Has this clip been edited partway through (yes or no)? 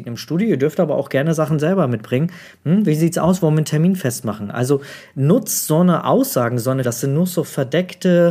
yes